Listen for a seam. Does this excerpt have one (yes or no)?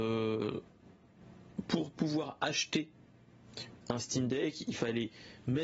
no